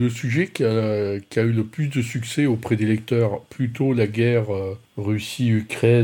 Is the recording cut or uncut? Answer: cut